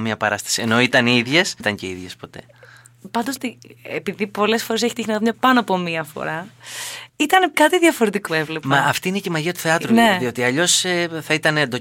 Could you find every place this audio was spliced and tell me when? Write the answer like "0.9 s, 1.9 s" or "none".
1.6 s, 3.4 s, 5.3 s, 7.1 s, 7.5 s, 8.3 s